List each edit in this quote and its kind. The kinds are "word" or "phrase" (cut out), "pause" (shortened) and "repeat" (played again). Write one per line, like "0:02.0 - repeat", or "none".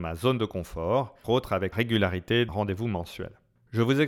0:01.2 - word
0:01.7 - word
0:02.5 - word